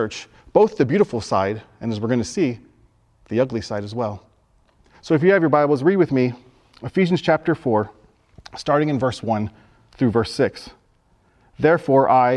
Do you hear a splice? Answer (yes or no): no